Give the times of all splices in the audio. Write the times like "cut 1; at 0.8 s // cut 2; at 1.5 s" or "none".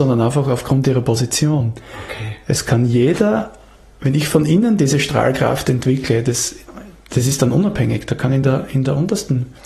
none